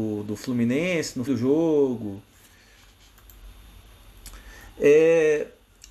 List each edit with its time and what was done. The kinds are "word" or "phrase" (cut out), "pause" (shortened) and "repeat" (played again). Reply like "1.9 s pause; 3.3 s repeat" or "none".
1.3 s word